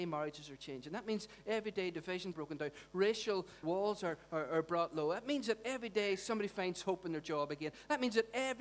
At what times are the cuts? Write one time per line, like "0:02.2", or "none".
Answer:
0:02.3
0:03.6